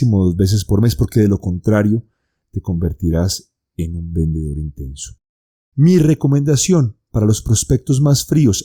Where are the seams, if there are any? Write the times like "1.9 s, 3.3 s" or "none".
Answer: none